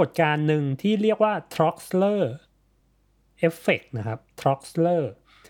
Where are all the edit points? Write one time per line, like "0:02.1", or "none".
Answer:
none